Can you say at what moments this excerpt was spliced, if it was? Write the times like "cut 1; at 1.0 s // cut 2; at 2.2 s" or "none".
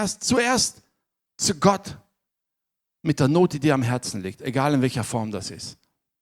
none